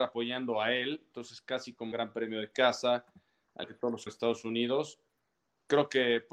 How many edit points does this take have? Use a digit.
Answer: 3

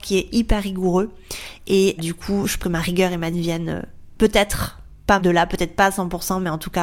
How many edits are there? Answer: 4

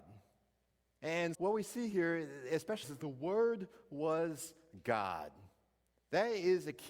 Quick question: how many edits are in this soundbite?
2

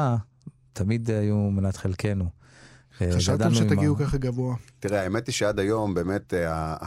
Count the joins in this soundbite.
1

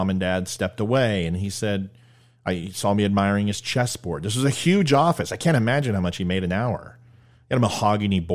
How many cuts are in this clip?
0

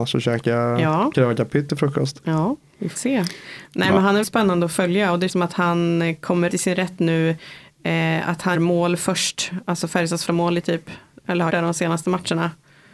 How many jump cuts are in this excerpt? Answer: 7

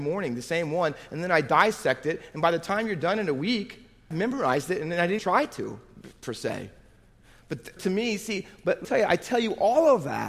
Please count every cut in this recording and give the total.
4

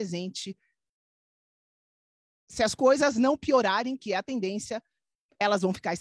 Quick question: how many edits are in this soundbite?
0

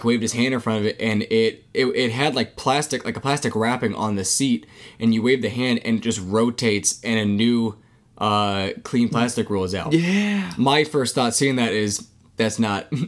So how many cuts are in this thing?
0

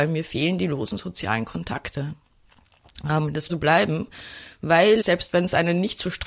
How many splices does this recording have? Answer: 2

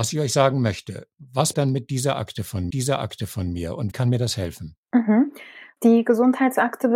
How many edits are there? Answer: 4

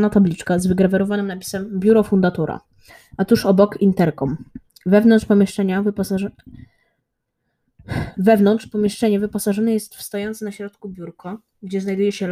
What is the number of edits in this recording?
0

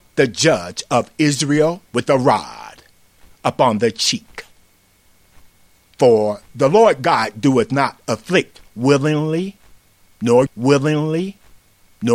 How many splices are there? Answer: 2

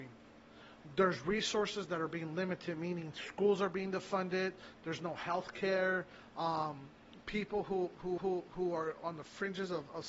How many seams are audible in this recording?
1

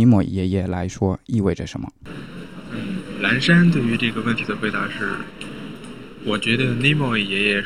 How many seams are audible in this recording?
0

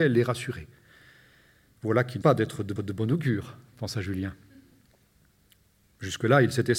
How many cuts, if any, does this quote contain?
2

